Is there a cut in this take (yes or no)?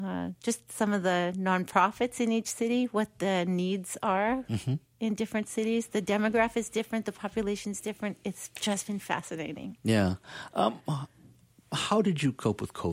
no